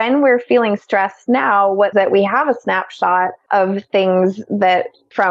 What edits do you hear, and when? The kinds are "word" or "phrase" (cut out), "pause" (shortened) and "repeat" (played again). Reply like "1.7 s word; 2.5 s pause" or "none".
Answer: 1.9 s phrase